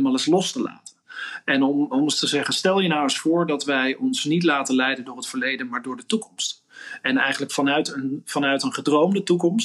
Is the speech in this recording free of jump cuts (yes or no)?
yes